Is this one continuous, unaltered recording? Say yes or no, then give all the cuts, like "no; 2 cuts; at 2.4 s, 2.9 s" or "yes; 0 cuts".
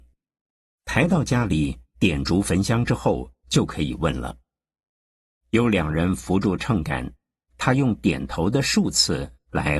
yes; 0 cuts